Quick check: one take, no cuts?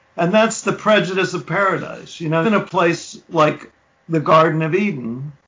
no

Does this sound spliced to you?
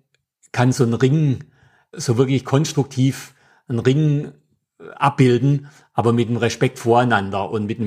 no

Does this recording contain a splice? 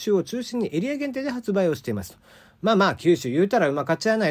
no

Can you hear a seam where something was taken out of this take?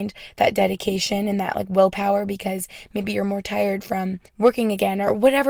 yes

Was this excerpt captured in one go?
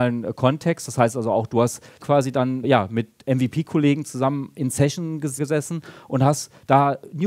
no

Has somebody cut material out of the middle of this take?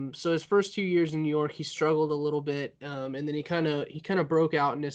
no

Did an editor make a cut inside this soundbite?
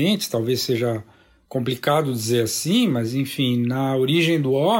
no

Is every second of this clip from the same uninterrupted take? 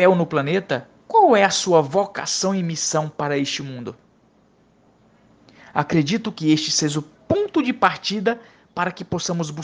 no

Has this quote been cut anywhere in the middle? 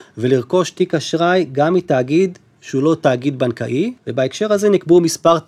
yes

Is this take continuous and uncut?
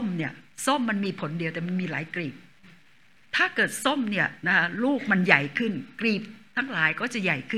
yes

